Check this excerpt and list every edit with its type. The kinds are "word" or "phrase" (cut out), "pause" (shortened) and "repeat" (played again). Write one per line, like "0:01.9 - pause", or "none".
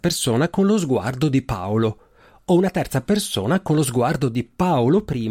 none